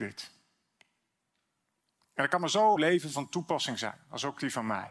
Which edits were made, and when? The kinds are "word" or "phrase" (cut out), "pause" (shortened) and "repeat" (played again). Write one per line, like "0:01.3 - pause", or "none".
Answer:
0:02.8 - phrase